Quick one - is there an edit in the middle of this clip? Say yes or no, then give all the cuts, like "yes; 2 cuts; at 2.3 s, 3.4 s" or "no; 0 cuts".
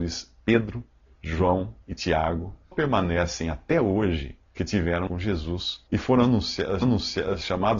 yes; 6 cuts; at 1.1 s, 2.7 s, 4.6 s, 5.1 s, 5.9 s, 6.8 s